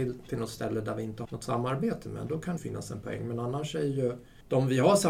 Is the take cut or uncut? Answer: cut